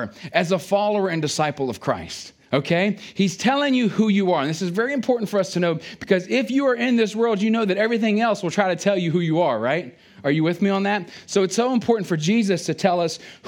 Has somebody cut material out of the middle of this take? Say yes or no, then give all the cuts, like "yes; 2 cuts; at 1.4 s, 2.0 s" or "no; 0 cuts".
yes; 1 cut; at 2.4 s